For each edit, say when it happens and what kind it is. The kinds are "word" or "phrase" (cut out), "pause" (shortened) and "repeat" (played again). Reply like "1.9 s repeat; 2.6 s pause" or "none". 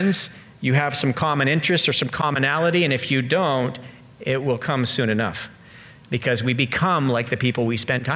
none

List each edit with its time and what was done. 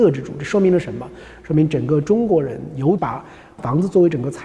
none

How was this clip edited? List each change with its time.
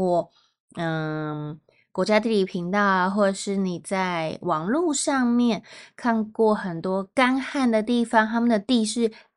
none

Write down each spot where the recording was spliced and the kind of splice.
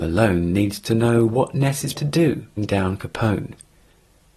1.9 s word; 2.6 s phrase

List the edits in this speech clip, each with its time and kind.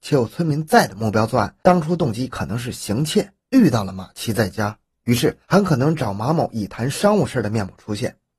3.4 s pause; 5.4 s pause

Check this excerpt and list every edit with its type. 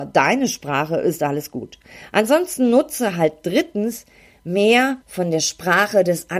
5.0 s pause

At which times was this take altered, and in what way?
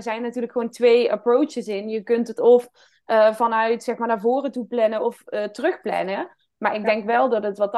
none

